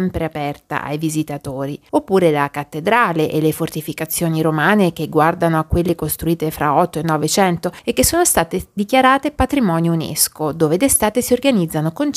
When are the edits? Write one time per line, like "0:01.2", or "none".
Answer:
none